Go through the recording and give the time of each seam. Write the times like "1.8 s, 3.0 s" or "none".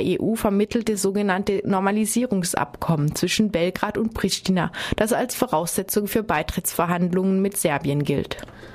none